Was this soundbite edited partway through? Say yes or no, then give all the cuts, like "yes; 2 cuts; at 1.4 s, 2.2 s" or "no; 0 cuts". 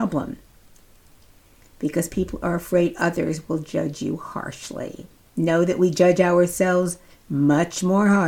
no; 0 cuts